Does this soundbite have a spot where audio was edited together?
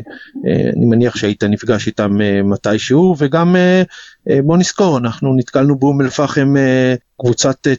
no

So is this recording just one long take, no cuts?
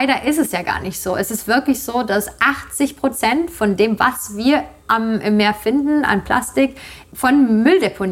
yes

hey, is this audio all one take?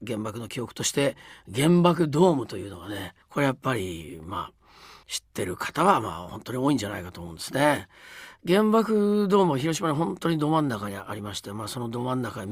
no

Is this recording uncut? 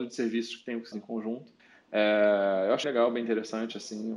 no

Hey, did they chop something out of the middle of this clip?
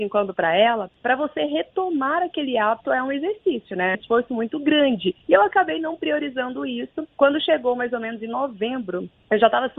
yes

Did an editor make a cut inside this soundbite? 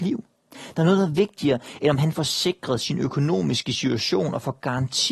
no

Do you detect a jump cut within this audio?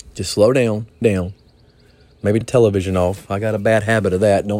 yes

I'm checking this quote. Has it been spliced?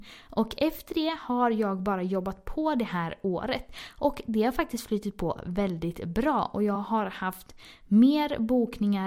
no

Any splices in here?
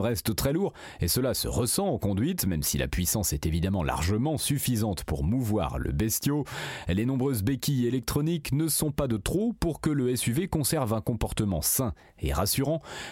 no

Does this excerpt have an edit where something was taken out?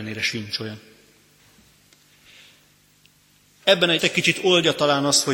yes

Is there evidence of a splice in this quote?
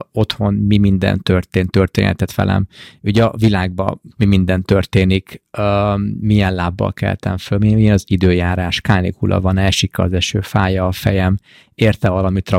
no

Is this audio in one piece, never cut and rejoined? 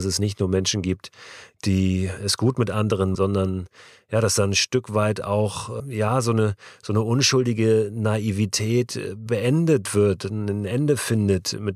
no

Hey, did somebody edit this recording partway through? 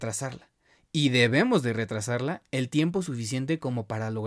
no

